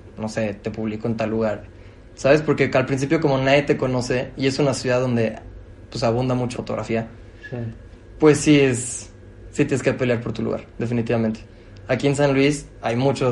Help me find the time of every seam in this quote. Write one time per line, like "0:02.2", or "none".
0:06.5